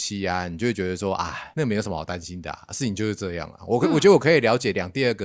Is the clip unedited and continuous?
no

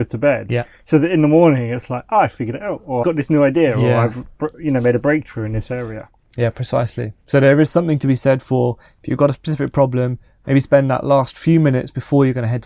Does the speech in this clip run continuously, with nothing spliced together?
no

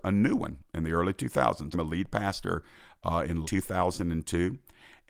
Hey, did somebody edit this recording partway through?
yes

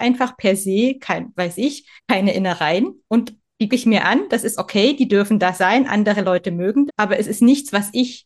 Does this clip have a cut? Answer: yes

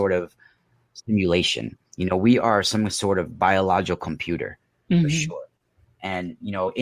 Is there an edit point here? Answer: no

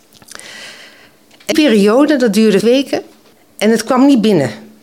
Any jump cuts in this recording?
yes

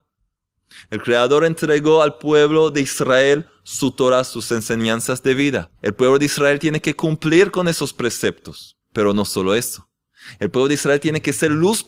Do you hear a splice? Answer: yes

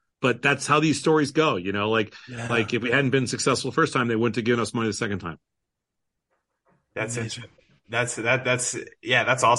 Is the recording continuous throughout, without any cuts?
yes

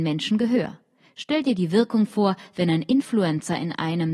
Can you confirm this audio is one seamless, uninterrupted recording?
yes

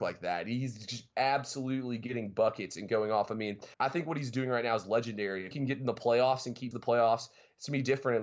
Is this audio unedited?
no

